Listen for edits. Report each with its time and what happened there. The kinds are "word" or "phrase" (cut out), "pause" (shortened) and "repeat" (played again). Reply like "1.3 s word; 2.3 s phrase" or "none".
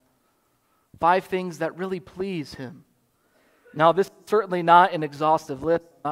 none